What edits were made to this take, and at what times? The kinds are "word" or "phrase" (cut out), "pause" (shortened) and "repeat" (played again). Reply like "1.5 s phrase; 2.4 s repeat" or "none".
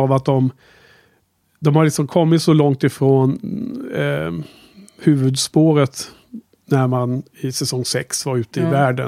none